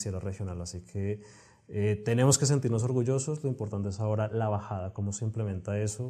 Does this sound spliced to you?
no; 0 cuts

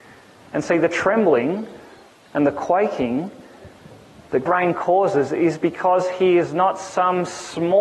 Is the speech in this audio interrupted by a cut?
yes; 1 cut; at 4.5 s

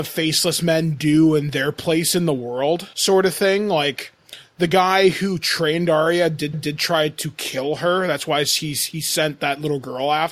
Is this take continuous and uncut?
no; 2 cuts; at 2.9 s, 6.5 s

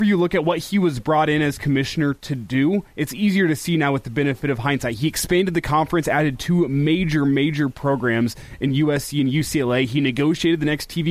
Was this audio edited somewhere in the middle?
no; 0 cuts

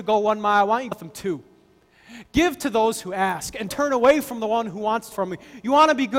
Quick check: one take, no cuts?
no; 3 cuts; at 0.9 s, 3.7 s, 5.1 s

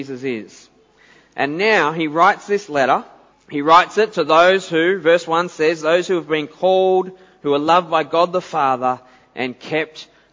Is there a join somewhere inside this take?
yes; 1 cut; at 3.3 s

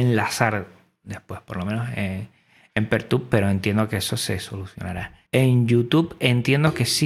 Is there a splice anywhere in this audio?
yes; 1 cut; at 5.3 s

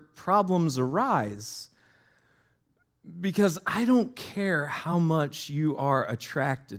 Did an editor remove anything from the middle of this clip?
no; 0 cuts

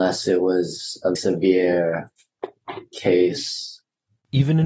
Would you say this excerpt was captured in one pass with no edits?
no; 1 cut; at 1.2 s

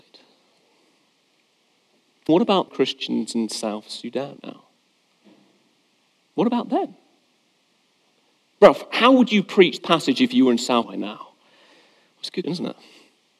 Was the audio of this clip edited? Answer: yes; 6 cuts; at 2.3 s, 2.7 s, 4.4 s, 9.8 s, 10.8 s, 12.4 s

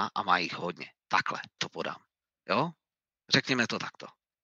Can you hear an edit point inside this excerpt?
yes; 1 cut; at 1.6 s

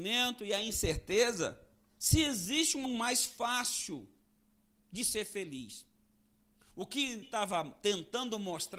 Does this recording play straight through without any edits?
no; 2 cuts; at 2.9 s, 7.2 s

